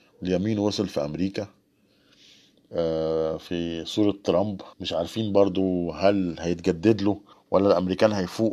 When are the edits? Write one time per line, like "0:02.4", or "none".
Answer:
0:04.7
0:07.3

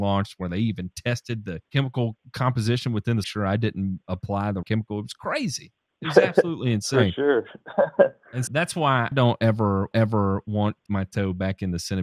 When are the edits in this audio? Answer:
0:01.7
0:03.2
0:04.6
0:08.5
0:09.1
0:09.9
0:10.9

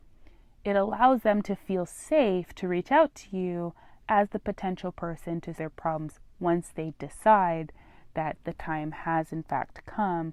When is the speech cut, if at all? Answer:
0:05.6

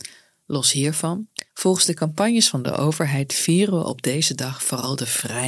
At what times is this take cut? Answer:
0:01.5

